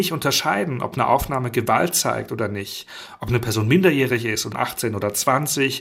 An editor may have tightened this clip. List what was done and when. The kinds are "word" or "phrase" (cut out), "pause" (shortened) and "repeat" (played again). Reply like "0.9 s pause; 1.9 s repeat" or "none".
4.5 s word